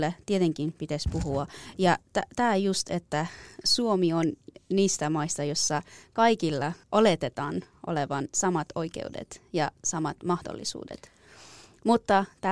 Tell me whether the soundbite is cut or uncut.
cut